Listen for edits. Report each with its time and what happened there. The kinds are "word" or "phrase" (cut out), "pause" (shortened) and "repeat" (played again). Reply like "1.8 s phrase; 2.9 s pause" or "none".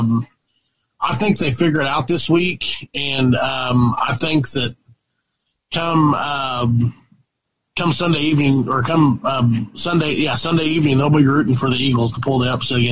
none